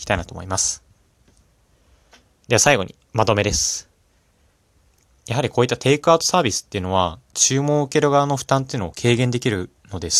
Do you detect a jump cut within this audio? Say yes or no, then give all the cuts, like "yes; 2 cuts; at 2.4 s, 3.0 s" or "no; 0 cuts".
no; 0 cuts